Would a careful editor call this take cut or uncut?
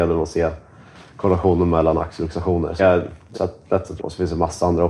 cut